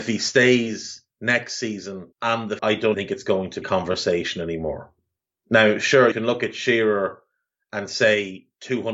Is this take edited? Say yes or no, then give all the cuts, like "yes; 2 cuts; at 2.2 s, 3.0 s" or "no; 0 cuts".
yes; 7 cuts; at 1.1 s, 2.1 s, 2.6 s, 2.9 s, 3.6 s, 5.2 s, 6.1 s